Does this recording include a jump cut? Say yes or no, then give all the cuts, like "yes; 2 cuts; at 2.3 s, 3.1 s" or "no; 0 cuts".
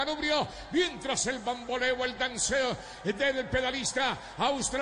no; 0 cuts